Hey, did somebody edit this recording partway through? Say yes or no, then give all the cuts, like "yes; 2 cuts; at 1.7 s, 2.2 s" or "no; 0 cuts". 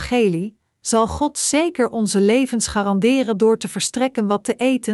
no; 0 cuts